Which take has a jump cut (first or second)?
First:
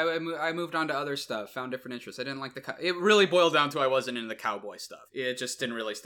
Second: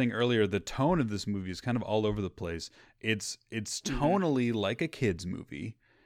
first